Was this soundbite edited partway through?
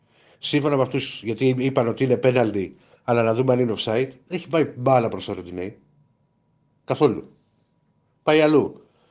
yes; 1 cut; at 4.3 s

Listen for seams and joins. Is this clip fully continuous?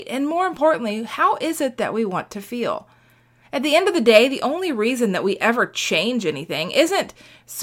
yes; 0 cuts

